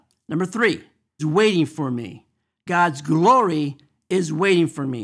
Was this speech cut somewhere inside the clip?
yes; 1 cut; at 1.2 s

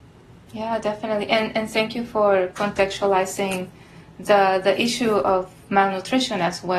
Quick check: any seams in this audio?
no; 0 cuts

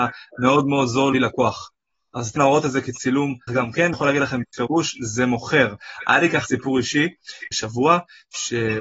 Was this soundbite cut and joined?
yes; 6 cuts; at 1.1 s, 2.4 s, 3.5 s, 3.9 s, 6.4 s, 7.5 s

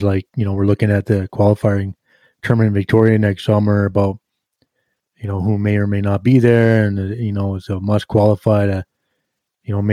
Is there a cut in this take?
no; 0 cuts

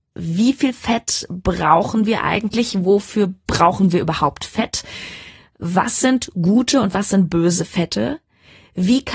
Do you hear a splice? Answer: no; 0 cuts

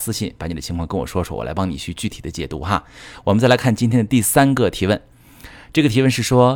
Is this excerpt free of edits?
yes; 0 cuts

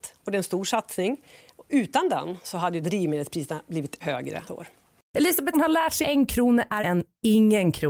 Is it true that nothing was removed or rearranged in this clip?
no; 6 cuts; at 2.8 s, 4.0 s, 4.5 s, 5.5 s, 6.0 s, 6.8 s

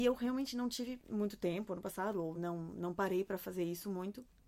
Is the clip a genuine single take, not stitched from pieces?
yes; 0 cuts

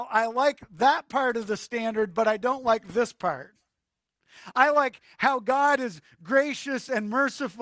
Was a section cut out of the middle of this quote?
no; 0 cuts

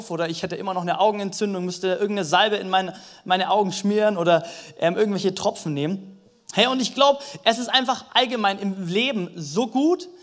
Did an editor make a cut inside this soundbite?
no; 0 cuts

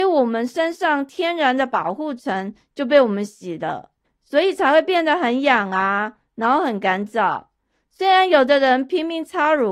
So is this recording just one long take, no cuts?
no; 1 cut; at 4.0 s

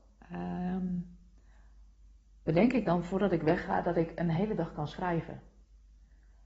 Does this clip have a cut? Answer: no; 0 cuts

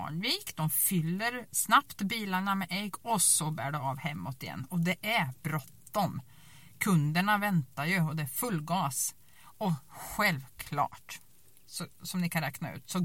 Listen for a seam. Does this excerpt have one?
no; 0 cuts

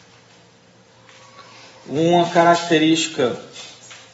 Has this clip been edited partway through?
yes; 1 cut; at 1.7 s

